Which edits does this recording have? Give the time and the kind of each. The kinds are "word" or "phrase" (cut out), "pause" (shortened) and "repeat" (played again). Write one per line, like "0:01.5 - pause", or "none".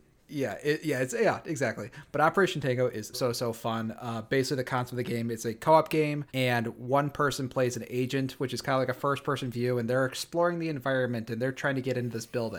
0:03.1 - word
0:06.3 - pause

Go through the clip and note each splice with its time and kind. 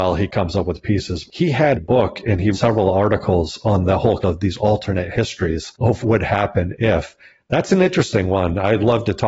0:01.7 - word
0:02.5 - word
0:04.2 - word
0:06.0 - word

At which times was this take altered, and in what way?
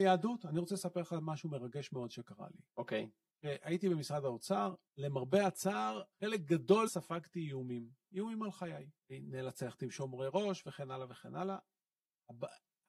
0:02.7 - pause
0:03.3 - pause
0:04.9 - pause
0:06.1 - pause
0:06.9 - phrase
0:09.0 - pause

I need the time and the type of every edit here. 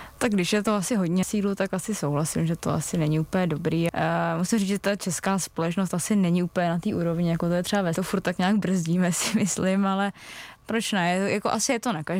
0:01.2 - word
0:03.9 - word
0:07.9 - phrase
0:10.6 - word

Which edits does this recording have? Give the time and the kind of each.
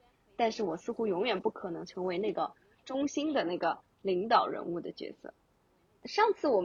none

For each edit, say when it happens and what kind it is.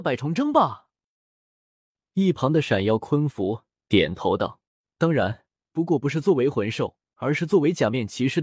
0:04.7 - pause
0:05.5 - pause
0:07.0 - pause

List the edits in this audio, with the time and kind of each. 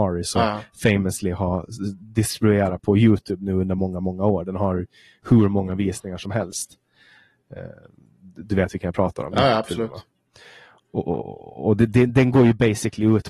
none

